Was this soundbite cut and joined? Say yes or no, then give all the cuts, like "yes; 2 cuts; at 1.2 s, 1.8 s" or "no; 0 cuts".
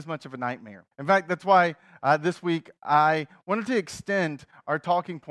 yes; 1 cut; at 0.9 s